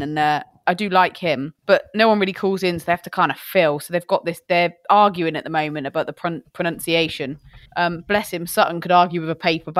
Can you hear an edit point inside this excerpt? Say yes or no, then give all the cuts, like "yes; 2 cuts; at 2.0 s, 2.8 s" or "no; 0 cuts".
yes; 2 cuts; at 1.6 s, 7.7 s